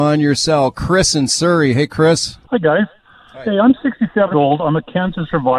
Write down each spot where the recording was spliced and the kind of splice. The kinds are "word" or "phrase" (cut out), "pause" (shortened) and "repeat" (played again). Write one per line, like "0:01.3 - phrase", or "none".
0:02.4 - pause
0:04.3 - word